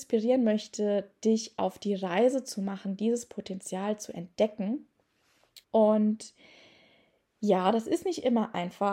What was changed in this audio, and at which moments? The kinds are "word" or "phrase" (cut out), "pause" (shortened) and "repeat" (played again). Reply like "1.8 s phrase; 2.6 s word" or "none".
5.6 s pause